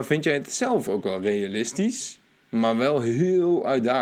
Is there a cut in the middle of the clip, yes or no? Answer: no